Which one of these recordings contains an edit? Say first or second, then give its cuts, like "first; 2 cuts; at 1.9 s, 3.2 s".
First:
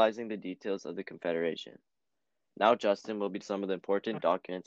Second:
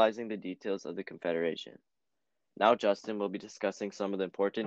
first; 1 cut; at 3.4 s